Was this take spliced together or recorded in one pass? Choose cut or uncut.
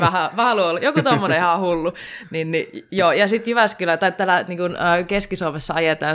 uncut